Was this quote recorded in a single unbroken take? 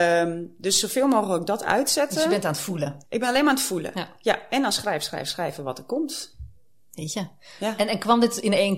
yes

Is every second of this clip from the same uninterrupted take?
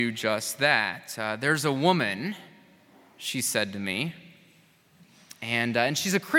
yes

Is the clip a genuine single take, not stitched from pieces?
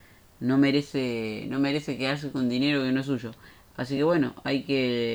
yes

